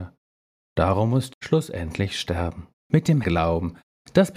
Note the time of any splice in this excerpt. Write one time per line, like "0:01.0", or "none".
0:01.3
0:02.8
0:03.2